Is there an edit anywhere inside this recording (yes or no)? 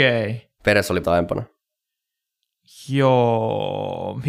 yes